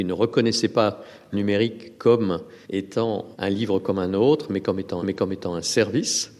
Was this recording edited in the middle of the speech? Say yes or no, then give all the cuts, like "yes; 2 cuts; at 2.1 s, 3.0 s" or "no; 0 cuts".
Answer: yes; 3 cuts; at 1.3 s, 2.6 s, 5.0 s